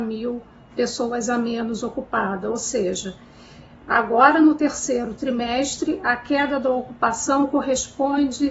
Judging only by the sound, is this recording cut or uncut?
uncut